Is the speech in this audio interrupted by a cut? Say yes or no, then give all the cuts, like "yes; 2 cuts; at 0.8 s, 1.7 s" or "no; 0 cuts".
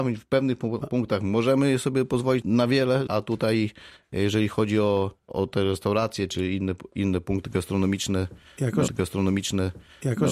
yes; 4 cuts; at 2.4 s, 3.1 s, 5.2 s, 8.9 s